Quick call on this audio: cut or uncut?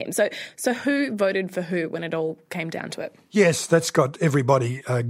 uncut